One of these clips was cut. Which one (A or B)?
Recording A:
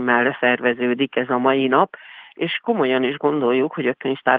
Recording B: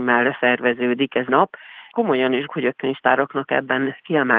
B